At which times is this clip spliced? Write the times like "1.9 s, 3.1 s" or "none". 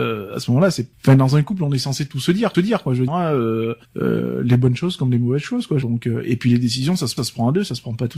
0.9 s, 2.5 s, 3.1 s, 3.8 s, 5.8 s, 7.2 s